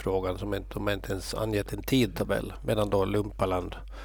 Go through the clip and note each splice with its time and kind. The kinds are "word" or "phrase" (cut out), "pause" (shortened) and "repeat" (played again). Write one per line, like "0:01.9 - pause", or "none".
none